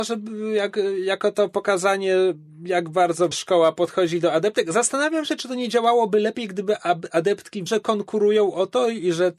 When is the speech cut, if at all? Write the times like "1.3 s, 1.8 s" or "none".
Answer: 3.3 s, 7.7 s